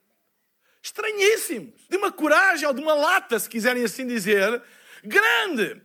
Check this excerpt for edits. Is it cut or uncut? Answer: cut